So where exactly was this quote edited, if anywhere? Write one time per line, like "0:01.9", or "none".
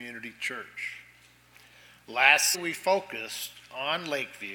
0:02.5